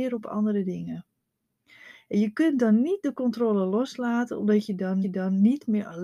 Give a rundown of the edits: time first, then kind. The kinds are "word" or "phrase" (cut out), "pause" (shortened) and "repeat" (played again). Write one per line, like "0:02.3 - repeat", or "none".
0:05.0 - repeat

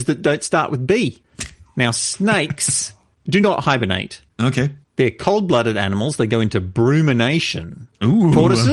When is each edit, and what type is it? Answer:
none

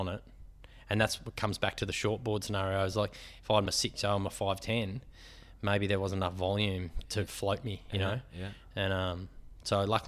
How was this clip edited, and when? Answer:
none

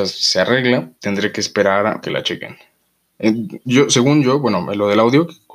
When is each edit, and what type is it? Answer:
0:00.9 - pause
0:02.0 - phrase

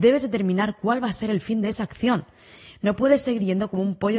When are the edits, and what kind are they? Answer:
none

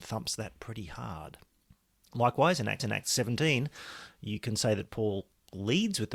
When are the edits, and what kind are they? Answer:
0:02.8 - repeat

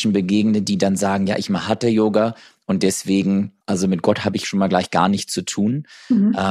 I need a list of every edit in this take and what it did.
0:03.6 - pause

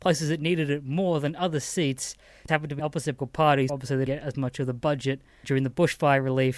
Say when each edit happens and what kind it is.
0:02.5 - word
0:02.8 - word
0:03.2 - word
0:03.7 - word
0:04.1 - word
0:05.4 - word

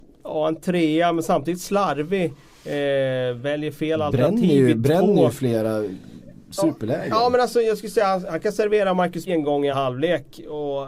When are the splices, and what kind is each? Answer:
0:09.3 - word
0:09.7 - word

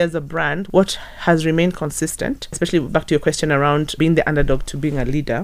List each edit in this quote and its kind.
0:02.9 - word
0:04.0 - word

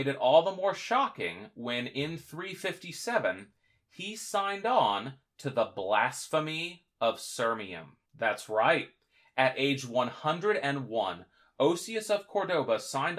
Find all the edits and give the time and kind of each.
0:08.1 - pause

